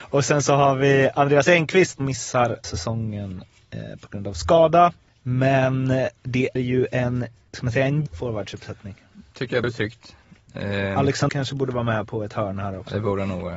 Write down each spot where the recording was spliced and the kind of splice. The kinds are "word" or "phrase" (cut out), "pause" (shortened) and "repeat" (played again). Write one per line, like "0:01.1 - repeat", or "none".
0:02.0 - word
0:02.6 - word
0:06.6 - word
0:08.1 - word
0:09.6 - word
0:11.3 - word